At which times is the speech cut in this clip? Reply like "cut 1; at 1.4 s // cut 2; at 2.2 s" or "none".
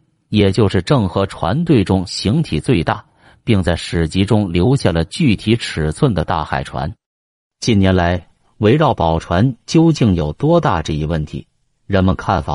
none